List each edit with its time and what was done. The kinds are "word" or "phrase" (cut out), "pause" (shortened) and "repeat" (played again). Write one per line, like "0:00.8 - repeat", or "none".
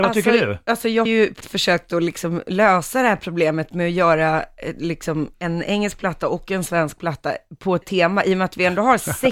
0:01.1 - word
0:01.4 - word
0:05.3 - word
0:07.8 - word